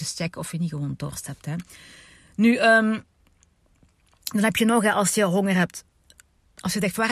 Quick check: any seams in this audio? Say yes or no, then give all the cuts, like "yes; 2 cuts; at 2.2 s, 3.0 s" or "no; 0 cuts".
no; 0 cuts